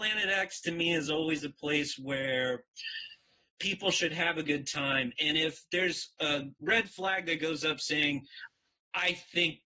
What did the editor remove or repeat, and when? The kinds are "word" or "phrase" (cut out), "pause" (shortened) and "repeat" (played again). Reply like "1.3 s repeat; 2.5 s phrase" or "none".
none